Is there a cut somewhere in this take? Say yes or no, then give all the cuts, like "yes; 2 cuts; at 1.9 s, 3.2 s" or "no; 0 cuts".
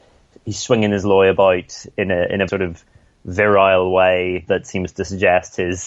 yes; 2 cuts; at 2.5 s, 4.4 s